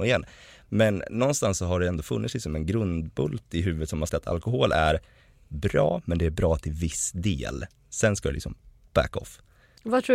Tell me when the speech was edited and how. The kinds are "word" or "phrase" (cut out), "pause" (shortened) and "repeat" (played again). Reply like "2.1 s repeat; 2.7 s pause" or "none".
4.1 s word